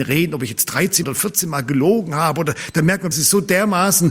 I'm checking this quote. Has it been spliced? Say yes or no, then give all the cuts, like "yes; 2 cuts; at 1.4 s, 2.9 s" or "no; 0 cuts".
yes; 2 cuts; at 1.0 s, 3.1 s